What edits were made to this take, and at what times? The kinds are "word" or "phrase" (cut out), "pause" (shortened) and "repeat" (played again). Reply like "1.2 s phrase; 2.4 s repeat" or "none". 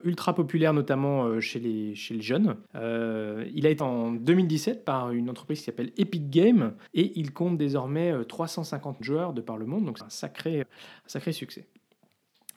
2.7 s pause; 3.8 s word; 6.9 s pause; 9.0 s word; 10.0 s phrase; 10.6 s word